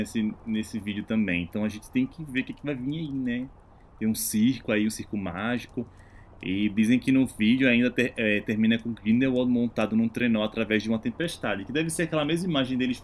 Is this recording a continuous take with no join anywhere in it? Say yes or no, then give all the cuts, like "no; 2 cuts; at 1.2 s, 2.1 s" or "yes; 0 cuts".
yes; 0 cuts